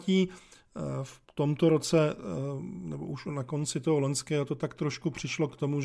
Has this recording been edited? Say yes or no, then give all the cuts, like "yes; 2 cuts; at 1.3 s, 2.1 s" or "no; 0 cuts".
yes; 1 cut; at 1.2 s